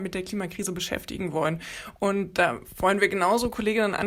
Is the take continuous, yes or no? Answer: yes